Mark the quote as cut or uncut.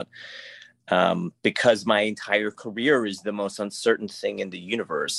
uncut